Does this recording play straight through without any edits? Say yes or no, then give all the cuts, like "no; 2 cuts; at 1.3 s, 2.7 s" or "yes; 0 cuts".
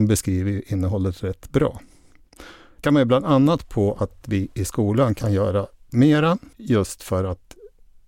no; 2 cuts; at 2.8 s, 6.5 s